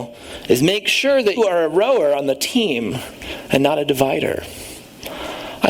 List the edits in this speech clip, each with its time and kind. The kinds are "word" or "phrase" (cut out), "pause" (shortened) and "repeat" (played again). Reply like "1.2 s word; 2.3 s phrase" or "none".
1.4 s word